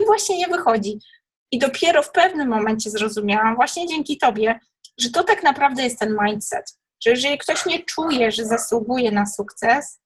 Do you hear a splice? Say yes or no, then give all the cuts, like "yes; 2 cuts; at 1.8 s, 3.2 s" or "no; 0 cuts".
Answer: no; 0 cuts